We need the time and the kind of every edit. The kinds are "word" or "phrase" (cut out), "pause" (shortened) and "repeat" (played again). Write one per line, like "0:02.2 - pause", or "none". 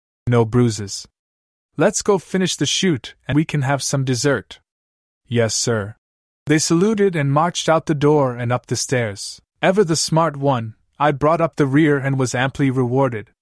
0:03.3 - word
0:09.5 - pause